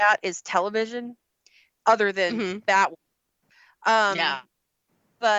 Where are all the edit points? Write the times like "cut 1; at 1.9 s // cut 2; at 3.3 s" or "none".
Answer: none